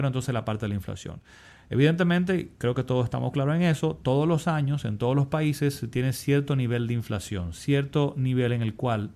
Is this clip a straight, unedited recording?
yes; 0 cuts

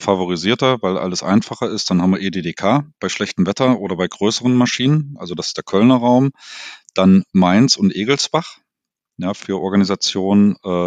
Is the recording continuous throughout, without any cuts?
yes; 0 cuts

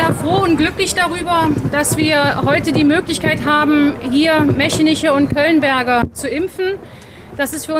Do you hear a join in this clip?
no; 0 cuts

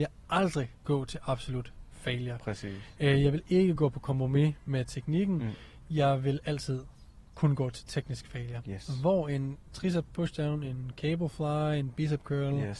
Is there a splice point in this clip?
no; 0 cuts

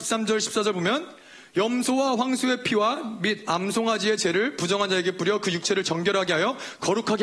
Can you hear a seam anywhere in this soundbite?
no; 0 cuts

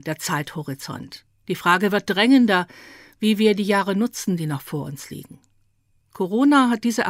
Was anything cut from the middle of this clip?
no; 0 cuts

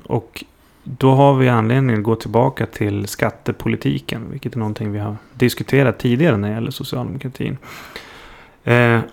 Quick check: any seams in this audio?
no; 0 cuts

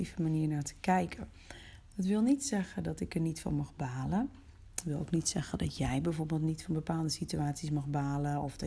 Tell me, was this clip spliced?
no; 0 cuts

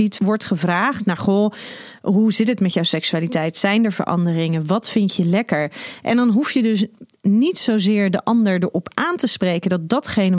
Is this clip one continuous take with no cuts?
yes; 0 cuts

